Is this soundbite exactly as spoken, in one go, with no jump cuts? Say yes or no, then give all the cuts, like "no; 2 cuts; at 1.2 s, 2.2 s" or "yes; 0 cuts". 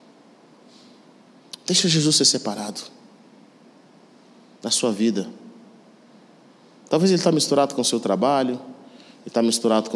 yes; 0 cuts